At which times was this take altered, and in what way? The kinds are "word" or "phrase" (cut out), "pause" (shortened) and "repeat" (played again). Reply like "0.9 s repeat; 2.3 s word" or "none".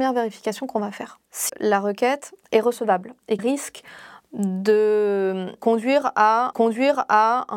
1.5 s phrase; 2.4 s pause; 3.4 s word; 6.5 s repeat